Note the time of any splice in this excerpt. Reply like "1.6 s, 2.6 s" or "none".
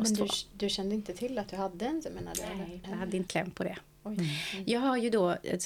2.0 s, 2.8 s, 3.3 s